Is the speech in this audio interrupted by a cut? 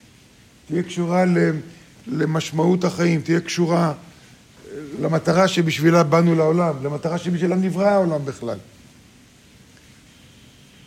no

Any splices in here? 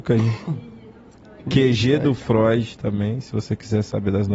no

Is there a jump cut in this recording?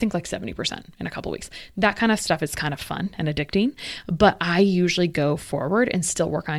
no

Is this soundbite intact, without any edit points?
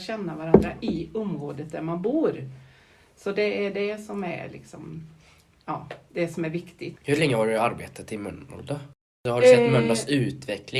yes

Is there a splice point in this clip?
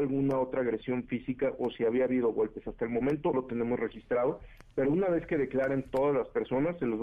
yes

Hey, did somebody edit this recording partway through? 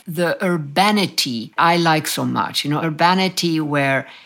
yes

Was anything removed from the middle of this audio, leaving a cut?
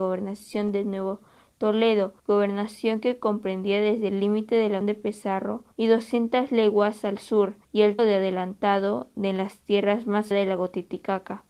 yes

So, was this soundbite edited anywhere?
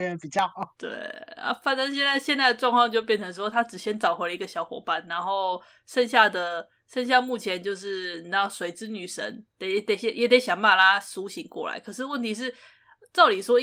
yes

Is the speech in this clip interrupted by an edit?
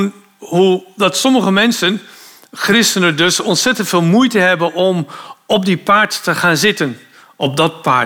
no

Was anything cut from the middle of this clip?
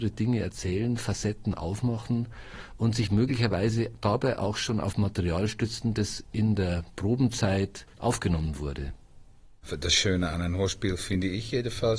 yes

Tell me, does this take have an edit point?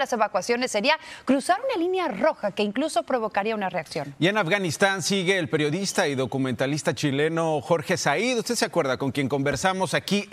no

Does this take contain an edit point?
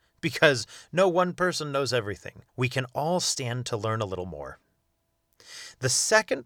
yes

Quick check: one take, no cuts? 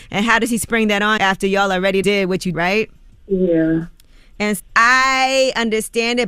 no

